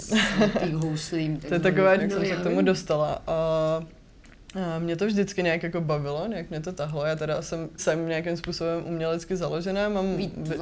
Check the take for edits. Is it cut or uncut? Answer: cut